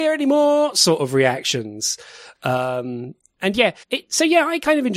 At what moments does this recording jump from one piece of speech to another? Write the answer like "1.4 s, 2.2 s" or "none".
3.8 s